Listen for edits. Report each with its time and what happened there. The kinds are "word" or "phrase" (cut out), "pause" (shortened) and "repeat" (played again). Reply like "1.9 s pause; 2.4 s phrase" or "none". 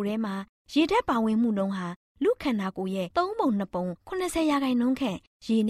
none